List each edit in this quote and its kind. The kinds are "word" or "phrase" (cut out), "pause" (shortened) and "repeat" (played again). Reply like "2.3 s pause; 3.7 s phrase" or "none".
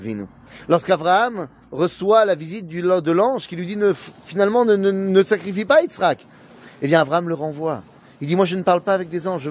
none